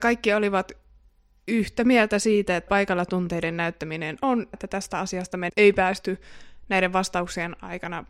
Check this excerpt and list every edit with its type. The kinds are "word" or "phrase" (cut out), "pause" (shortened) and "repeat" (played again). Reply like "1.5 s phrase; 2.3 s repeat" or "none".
2.7 s word; 4.5 s word; 5.5 s word